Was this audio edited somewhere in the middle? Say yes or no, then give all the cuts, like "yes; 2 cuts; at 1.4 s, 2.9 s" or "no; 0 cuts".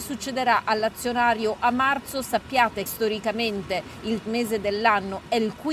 yes; 2 cuts; at 2.9 s, 4.3 s